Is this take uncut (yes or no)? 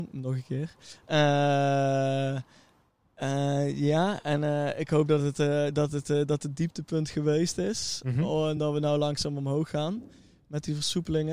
yes